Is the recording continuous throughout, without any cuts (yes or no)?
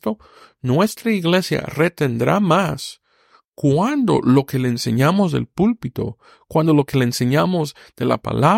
yes